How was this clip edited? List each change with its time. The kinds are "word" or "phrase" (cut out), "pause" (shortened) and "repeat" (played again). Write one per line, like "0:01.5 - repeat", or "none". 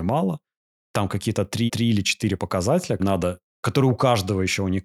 0:01.7 - repeat
0:02.4 - word
0:03.0 - word